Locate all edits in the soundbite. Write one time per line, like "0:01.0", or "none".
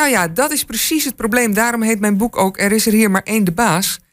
none

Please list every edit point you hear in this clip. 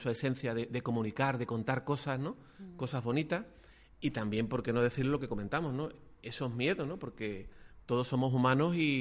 none

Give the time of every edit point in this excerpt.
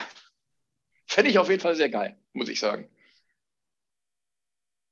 0:02.2

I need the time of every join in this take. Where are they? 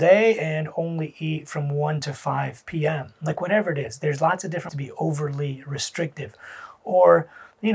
0:04.7

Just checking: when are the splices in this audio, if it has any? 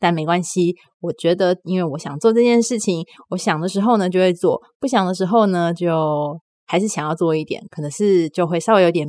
none

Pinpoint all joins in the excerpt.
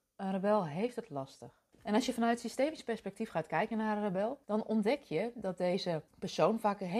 0:01.7
0:04.4
0:06.1

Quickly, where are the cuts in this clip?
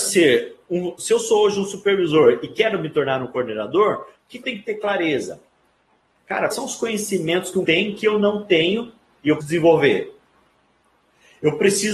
0:04.4
0:06.5
0:07.7
0:09.4

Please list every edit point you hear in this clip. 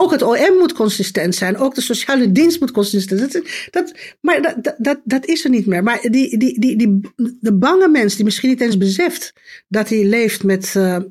none

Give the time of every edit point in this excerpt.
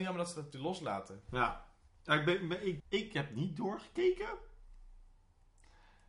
0:02.8

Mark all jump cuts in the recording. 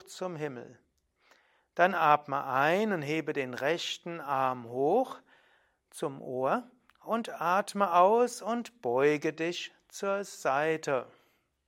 none

